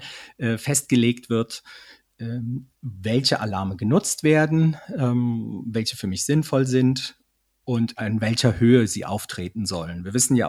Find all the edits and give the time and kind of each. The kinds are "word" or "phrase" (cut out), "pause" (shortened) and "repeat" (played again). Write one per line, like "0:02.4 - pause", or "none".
none